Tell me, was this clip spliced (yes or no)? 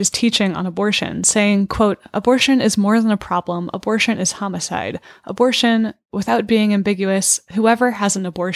no